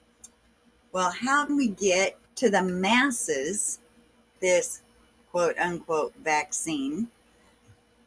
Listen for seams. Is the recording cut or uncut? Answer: cut